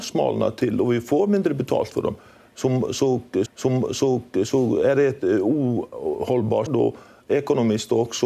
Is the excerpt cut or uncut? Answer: cut